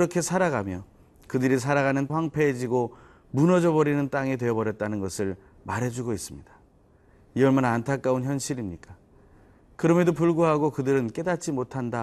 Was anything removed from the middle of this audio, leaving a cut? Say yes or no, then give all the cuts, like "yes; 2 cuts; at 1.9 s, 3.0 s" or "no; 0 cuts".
yes; 1 cut; at 2.1 s